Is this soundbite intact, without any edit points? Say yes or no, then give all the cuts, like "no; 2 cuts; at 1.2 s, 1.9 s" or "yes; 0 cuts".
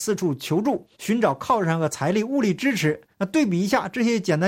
no; 2 cuts; at 0.9 s, 3.1 s